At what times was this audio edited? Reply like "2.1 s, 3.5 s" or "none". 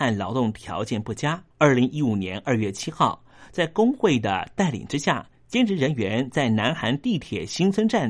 1.5 s, 5.3 s